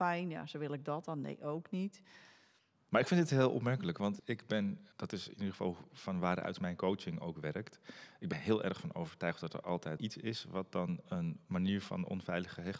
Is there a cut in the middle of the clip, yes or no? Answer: yes